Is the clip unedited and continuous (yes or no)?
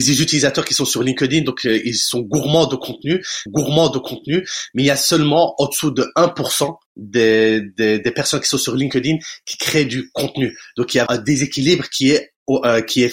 no